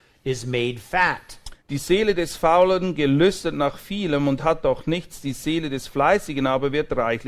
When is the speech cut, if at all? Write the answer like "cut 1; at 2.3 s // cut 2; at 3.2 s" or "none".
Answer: cut 1; at 1.6 s